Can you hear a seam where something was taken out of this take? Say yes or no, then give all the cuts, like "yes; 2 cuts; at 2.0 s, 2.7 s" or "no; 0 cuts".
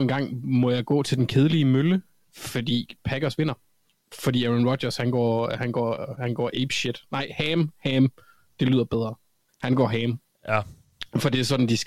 yes; 1 cut; at 9.5 s